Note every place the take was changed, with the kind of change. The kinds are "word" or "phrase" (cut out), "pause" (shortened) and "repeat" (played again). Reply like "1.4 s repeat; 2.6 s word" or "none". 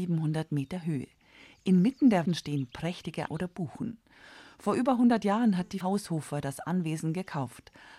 2.3 s word; 3.3 s word; 5.8 s word